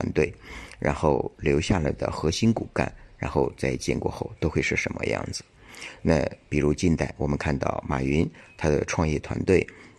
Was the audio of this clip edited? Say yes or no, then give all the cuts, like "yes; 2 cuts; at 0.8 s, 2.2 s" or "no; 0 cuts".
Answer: no; 0 cuts